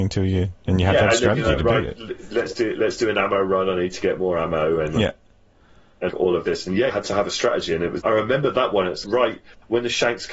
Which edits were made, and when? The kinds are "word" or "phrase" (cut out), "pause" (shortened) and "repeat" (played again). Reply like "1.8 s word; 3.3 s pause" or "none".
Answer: 6.1 s word; 6.9 s word; 8.0 s word; 9.0 s word